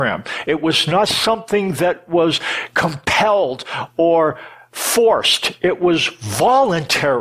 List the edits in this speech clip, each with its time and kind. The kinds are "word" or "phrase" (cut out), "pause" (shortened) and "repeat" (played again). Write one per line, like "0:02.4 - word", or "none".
none